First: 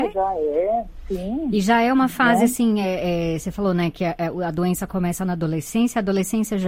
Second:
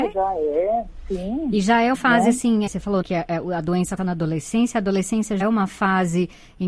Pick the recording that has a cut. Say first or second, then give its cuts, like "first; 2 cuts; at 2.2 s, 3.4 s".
second; 5 cuts; at 1.9 s, 2.7 s, 3.0 s, 4.0 s, 5.4 s